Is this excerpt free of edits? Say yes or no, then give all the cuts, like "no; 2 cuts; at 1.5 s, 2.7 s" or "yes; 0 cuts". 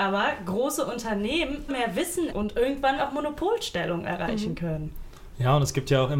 no; 3 cuts; at 1.7 s, 2.3 s, 3.0 s